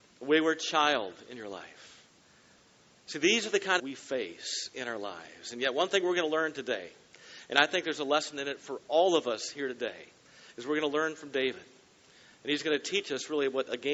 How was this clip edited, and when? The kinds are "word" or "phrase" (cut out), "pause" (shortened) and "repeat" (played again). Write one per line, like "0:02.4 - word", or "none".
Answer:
0:03.8 - phrase